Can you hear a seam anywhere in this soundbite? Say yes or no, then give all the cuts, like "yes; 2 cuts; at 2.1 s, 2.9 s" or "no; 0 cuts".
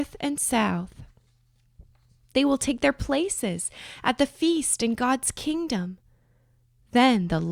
no; 0 cuts